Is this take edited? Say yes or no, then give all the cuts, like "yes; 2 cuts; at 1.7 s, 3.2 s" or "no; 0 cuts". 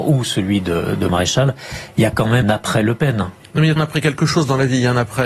yes; 3 cuts; at 1.1 s, 2.4 s, 3.8 s